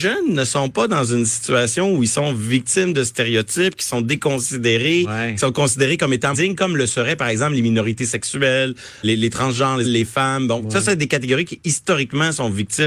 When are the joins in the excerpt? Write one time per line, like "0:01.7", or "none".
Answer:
0:06.3
0:09.0
0:09.8